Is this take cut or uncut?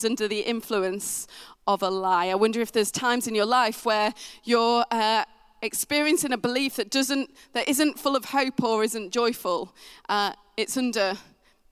uncut